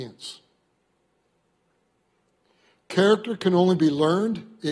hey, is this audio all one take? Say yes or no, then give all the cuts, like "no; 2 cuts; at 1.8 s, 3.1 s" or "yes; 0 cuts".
yes; 0 cuts